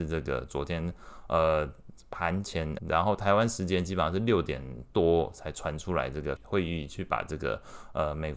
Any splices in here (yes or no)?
yes